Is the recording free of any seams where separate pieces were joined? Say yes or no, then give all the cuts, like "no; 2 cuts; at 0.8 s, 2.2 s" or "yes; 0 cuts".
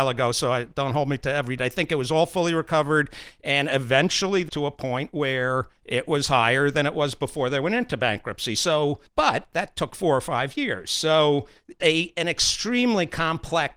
no; 5 cuts; at 1.6 s, 4.5 s, 5.8 s, 9.1 s, 11.8 s